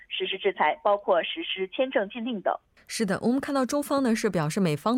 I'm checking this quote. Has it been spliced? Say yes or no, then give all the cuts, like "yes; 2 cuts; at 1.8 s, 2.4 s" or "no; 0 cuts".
yes; 1 cut; at 2.8 s